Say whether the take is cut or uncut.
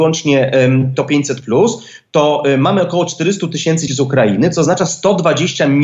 cut